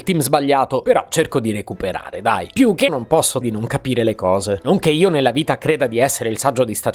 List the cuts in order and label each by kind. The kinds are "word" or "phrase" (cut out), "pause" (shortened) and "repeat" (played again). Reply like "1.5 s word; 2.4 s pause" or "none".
2.9 s word; 3.4 s word